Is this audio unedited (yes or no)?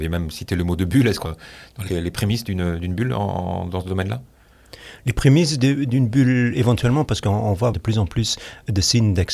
no